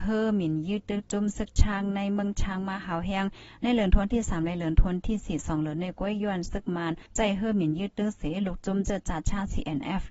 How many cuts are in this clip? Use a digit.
1